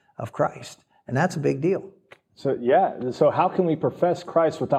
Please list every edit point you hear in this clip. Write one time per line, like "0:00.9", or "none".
none